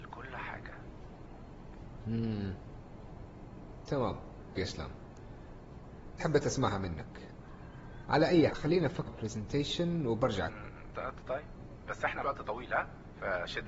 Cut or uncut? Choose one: cut